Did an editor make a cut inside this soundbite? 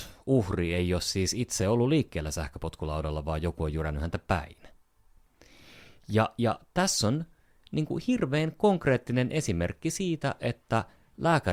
no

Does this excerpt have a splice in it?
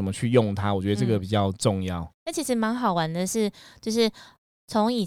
no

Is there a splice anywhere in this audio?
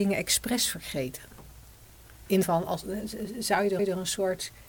yes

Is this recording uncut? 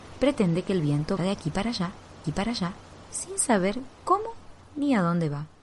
no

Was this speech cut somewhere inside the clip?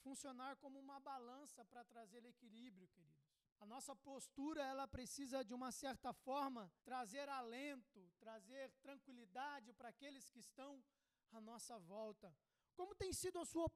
yes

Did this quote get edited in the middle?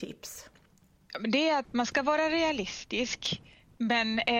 yes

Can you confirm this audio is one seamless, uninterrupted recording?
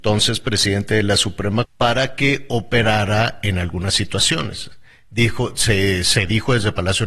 no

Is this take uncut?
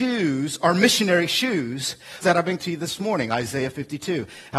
no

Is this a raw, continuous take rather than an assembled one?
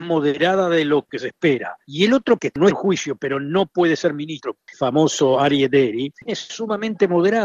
no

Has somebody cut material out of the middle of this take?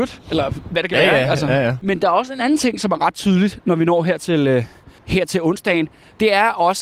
yes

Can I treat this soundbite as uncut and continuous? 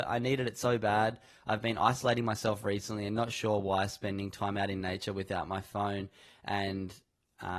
yes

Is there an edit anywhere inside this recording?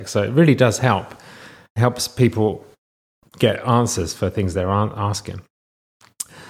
no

